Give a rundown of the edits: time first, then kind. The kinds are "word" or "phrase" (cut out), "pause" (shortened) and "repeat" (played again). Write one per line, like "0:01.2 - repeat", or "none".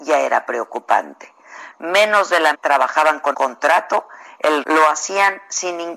0:02.5 - word
0:03.3 - word
0:04.6 - word